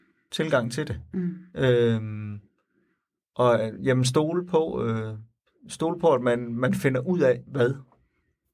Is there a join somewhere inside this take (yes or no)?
no